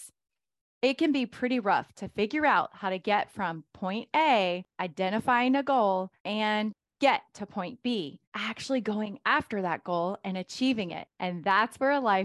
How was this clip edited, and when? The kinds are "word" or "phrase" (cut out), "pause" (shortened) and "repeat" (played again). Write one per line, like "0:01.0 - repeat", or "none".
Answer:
0:04.7 - pause
0:06.2 - pause
0:08.3 - pause
0:11.1 - pause